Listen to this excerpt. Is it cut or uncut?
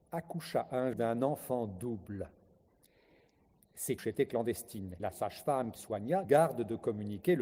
cut